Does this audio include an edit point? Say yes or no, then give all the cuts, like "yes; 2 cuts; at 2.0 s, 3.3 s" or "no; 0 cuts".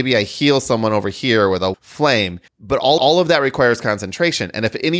yes; 3 cuts; at 1.7 s, 2.5 s, 3.0 s